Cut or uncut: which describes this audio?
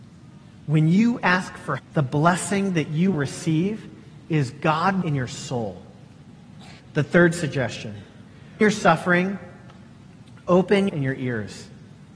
cut